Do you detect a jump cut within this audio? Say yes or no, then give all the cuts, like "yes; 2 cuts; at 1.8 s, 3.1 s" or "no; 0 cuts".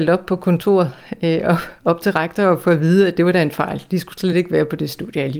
no; 0 cuts